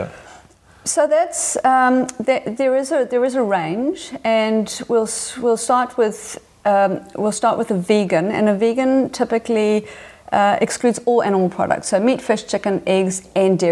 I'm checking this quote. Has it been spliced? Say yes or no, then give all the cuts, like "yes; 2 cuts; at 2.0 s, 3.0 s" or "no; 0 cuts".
no; 0 cuts